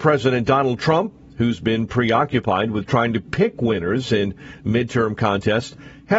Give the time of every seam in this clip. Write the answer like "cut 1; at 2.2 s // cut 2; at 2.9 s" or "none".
none

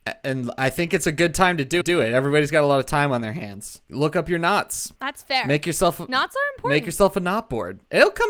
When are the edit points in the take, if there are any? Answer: cut 1; at 1.8 s // cut 2; at 3.8 s // cut 3; at 5.0 s

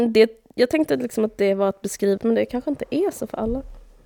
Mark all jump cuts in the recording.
cut 1; at 2.2 s

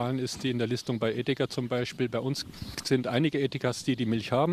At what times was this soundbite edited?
none

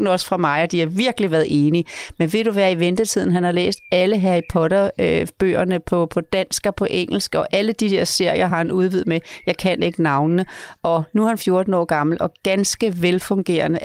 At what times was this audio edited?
none

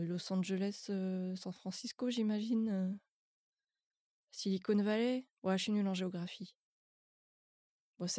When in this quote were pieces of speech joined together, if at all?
cut 1; at 5.3 s

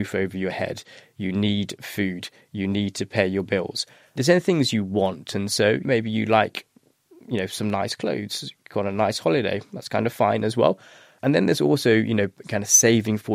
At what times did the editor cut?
none

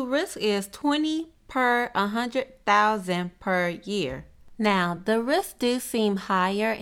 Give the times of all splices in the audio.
none

